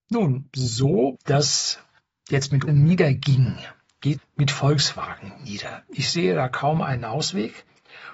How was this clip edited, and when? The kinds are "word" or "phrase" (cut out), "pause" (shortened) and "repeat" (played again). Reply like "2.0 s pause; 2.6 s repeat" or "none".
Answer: 1.2 s word; 2.0 s pause; 2.7 s word; 4.2 s phrase